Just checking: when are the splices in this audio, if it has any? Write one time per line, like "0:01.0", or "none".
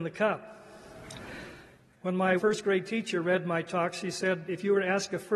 0:02.4